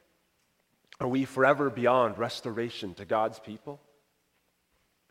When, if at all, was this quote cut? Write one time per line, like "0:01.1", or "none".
none